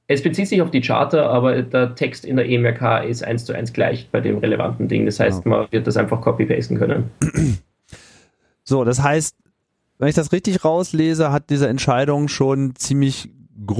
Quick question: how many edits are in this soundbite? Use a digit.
0